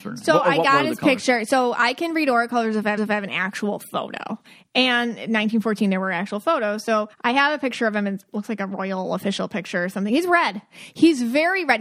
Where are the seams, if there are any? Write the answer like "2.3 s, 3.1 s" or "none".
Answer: 3.0 s, 7.1 s